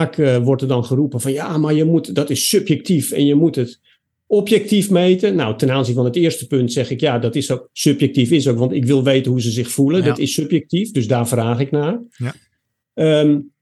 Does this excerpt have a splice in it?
no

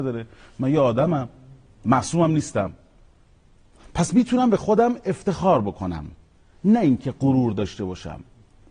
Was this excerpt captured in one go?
yes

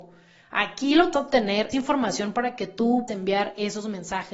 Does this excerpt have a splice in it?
yes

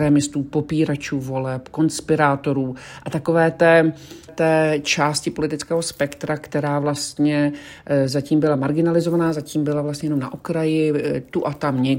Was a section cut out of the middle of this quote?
yes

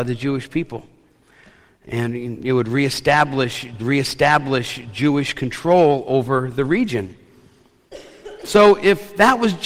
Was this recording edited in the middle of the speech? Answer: yes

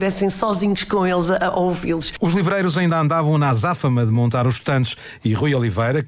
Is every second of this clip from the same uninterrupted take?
yes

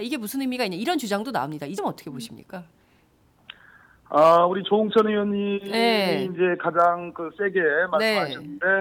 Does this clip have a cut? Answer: yes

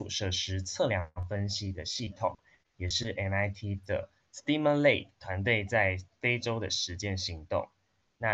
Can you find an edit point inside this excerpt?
no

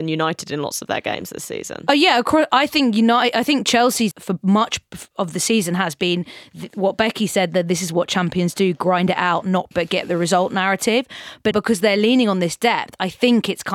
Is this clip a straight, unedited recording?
no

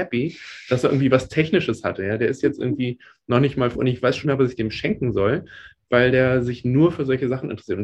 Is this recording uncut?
no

